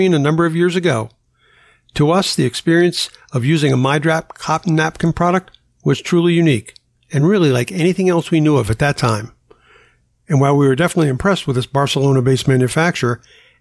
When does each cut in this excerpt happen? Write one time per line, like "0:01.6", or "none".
none